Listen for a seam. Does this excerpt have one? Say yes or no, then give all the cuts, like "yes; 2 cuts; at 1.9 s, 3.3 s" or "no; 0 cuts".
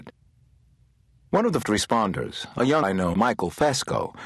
yes; 3 cuts; at 1.6 s, 2.8 s, 3.1 s